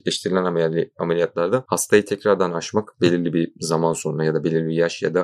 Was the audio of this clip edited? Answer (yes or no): no